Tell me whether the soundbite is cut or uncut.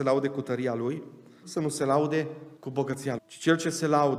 cut